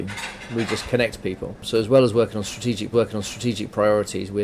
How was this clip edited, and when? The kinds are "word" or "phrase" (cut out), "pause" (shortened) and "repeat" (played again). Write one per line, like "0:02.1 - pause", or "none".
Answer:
0:02.9 - repeat

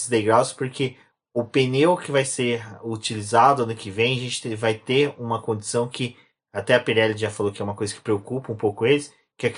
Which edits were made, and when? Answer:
none

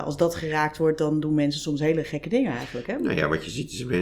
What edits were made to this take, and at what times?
none

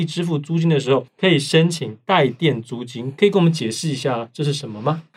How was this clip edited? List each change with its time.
0:01.1 - pause

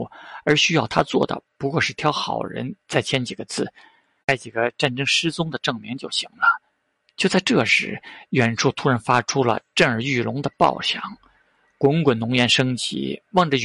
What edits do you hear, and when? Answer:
none

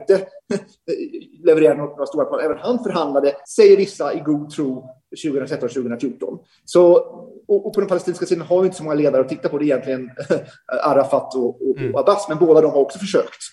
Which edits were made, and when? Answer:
0:03.4 - pause

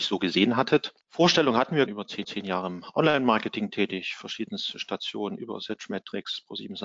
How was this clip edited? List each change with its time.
0:01.0 - pause
0:01.9 - phrase
0:02.2 - repeat

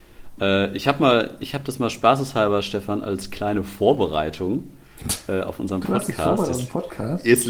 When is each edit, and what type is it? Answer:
none

